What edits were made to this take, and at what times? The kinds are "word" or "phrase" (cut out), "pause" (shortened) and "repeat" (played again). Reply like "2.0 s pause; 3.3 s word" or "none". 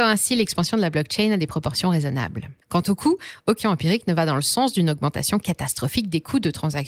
2.6 s pause; 3.6 s word

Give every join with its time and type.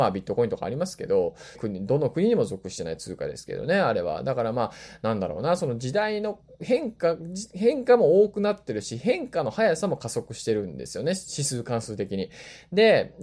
1.5 s word

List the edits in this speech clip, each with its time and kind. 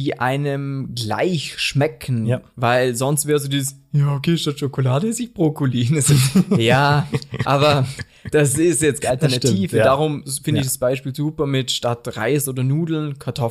9.0 s phrase

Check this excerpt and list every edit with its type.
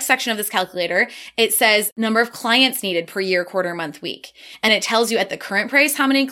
4.7 s word

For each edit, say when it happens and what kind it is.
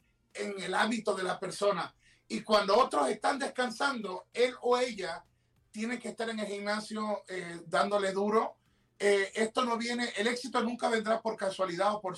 none

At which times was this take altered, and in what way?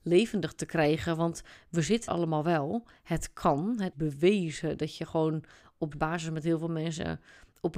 2.1 s word; 3.9 s word; 5.9 s word

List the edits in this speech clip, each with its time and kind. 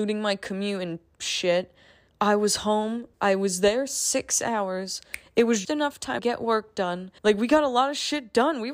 2.1 s pause; 3.1 s pause; 5.6 s word; 6.2 s word; 7.2 s pause

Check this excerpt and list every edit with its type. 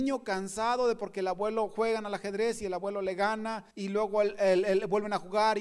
3.7 s pause

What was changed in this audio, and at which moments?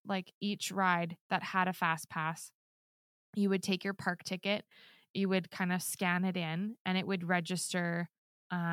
none

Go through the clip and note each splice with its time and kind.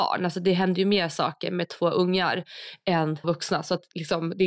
3.2 s word

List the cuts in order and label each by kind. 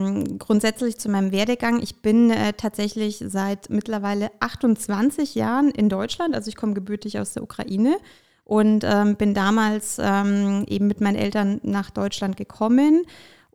none

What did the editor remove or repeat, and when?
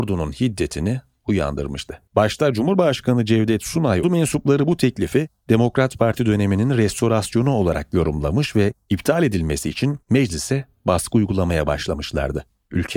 2.1 s pause; 4.0 s phrase; 10.0 s pause

